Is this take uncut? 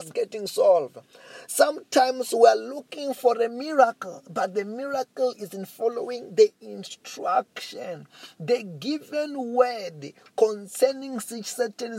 yes; 0 cuts

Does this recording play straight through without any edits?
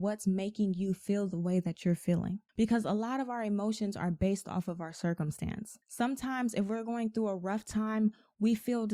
no; 2 cuts; at 2.5 s, 5.8 s

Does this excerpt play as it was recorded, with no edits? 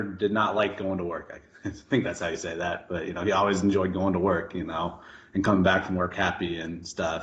yes; 0 cuts

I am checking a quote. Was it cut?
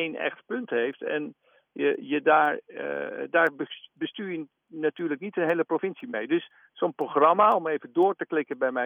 no; 0 cuts

